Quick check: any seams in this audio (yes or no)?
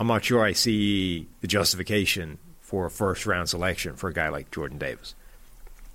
no